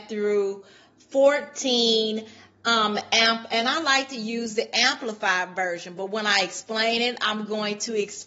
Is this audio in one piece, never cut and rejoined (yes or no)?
yes